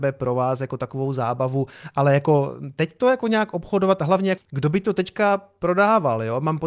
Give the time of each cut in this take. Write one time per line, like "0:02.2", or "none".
0:04.4

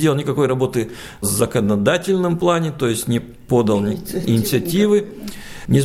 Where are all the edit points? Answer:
none

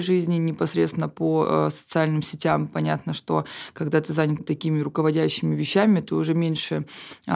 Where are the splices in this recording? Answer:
0:04.4

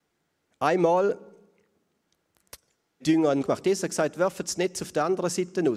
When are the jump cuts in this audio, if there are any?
0:03.0
0:03.4

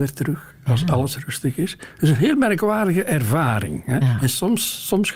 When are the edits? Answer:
none

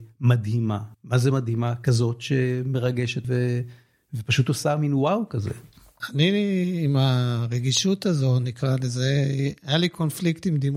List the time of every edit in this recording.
0:00.9
0:03.2

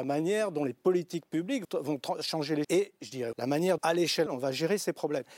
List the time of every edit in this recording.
0:01.6
0:02.6
0:03.3
0:03.8
0:04.3

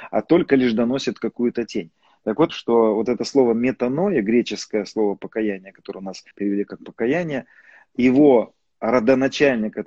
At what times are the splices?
0:02.5
0:06.3

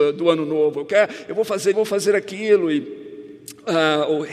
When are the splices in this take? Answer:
0:01.7

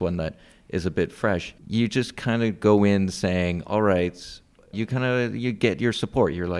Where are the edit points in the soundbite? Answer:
0:01.6
0:04.7

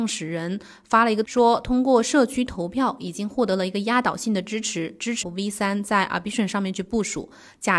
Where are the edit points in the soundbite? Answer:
0:01.2
0:05.2

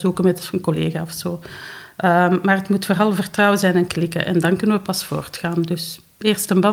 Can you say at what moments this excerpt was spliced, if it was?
none

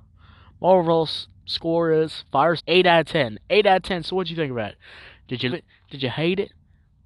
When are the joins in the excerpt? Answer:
0:02.6
0:05.5

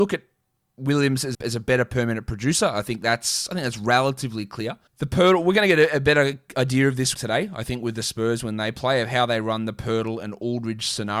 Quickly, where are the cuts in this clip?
0:01.3
0:04.9
0:07.1

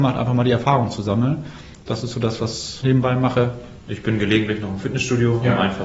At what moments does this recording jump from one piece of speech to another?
0:02.8
0:03.8

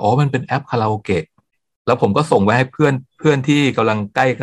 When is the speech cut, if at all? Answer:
0:01.5
0:03.1

